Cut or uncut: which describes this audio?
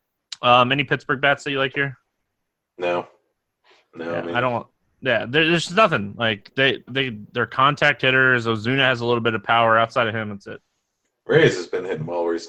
cut